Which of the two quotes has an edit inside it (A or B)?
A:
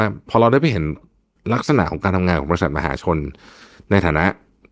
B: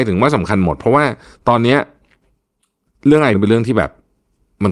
B